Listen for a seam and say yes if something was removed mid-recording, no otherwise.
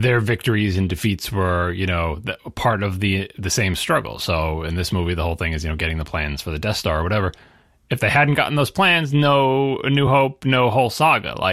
no